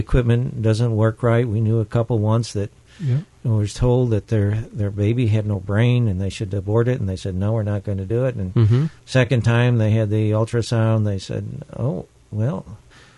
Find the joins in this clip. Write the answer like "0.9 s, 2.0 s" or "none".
none